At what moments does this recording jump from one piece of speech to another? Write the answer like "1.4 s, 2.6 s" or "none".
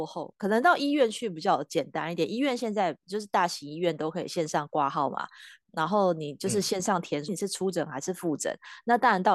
7.3 s